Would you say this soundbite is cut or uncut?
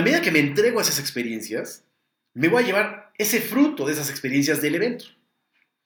uncut